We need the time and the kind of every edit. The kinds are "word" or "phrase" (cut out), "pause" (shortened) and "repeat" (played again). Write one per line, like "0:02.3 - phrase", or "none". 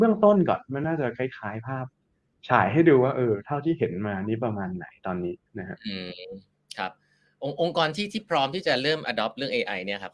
none